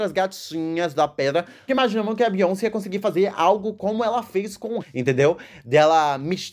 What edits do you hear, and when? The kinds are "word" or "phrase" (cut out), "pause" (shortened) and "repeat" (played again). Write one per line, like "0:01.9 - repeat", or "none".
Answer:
0:01.7 - word
0:04.8 - word